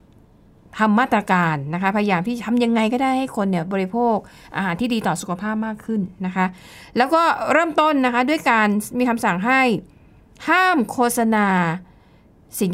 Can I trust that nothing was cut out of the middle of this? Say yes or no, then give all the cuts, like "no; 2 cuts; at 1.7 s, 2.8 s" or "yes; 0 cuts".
yes; 0 cuts